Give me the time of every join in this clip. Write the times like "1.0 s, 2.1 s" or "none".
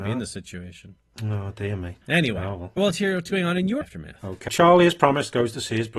2.8 s, 3.8 s, 4.5 s